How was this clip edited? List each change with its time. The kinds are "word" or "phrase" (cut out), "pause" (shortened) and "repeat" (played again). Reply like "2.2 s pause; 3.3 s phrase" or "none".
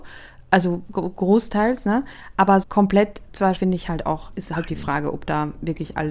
2.6 s phrase; 3.6 s word